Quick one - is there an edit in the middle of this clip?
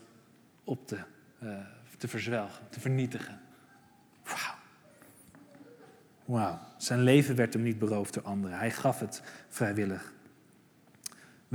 no; 0 cuts

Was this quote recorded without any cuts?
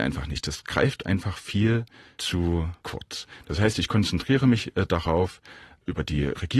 yes; 0 cuts

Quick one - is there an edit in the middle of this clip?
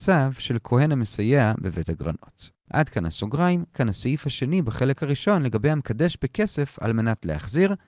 yes; 1 cut; at 3.7 s

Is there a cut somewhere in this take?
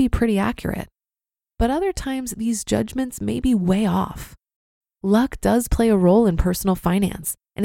no; 0 cuts

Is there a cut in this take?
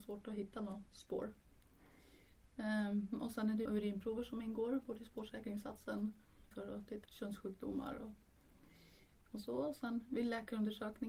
yes; 3 cuts; at 3.6 s, 6.5 s, 7.0 s

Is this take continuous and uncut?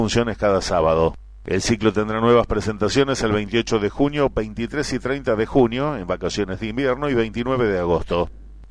yes; 0 cuts

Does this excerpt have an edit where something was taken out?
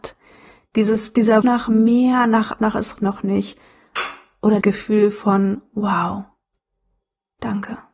yes; 4 cuts; at 1.4 s, 2.6 s, 3.0 s, 4.6 s

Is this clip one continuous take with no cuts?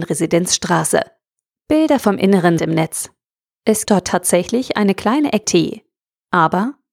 no; 3 cuts; at 2.6 s, 3.9 s, 5.4 s

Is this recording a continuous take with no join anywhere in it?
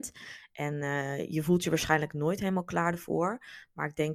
yes; 0 cuts

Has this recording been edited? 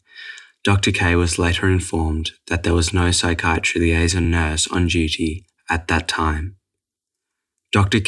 no; 0 cuts

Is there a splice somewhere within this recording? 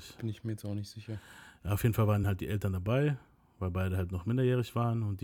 no; 0 cuts

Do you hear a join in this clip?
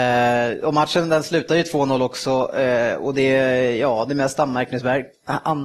no; 0 cuts

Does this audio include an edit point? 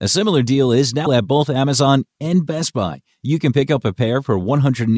yes; 1 cut; at 1.1 s

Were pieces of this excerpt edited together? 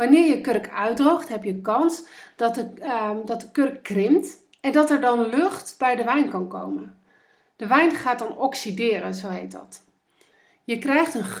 no; 0 cuts

